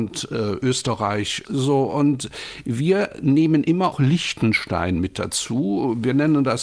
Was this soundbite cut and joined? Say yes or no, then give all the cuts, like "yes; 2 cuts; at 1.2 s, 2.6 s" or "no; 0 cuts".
yes; 2 cuts; at 1.4 s, 3.9 s